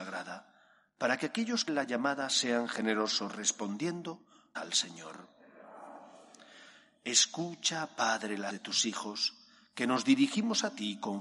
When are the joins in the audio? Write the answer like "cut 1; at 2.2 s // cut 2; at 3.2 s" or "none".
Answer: cut 1; at 1.7 s // cut 2; at 4.5 s // cut 3; at 8.5 s